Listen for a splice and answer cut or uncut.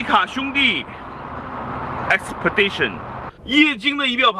cut